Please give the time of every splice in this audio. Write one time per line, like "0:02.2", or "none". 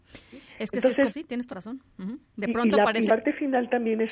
0:01.1
0:01.5
0:03.1